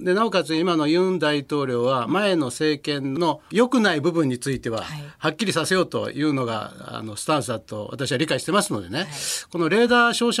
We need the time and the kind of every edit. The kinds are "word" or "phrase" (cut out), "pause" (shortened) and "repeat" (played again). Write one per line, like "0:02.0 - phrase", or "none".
0:03.4 - pause